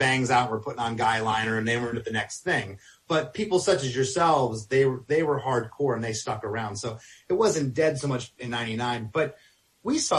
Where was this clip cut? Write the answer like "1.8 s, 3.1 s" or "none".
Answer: none